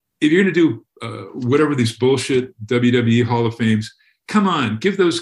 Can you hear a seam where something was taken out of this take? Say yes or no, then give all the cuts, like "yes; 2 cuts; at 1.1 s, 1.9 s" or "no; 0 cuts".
no; 0 cuts